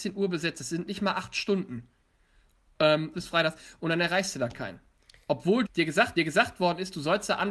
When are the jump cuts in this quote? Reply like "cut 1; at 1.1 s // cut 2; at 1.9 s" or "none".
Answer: cut 1; at 3.1 s // cut 2; at 5.7 s // cut 3; at 6.2 s